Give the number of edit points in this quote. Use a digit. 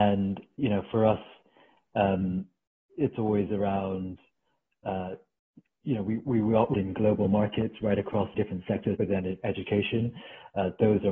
3